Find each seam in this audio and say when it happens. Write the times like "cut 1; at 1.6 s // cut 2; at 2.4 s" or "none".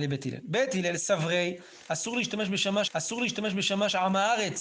cut 1; at 2.9 s